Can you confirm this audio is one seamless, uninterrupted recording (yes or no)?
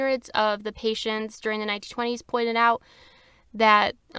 yes